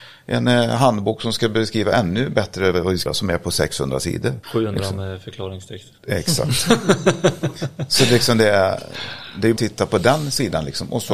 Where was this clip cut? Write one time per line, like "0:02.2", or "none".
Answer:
0:03.1
0:04.4
0:09.6